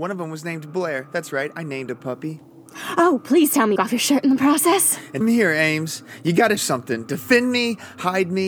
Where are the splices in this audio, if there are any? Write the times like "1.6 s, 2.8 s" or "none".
3.8 s, 5.2 s, 6.6 s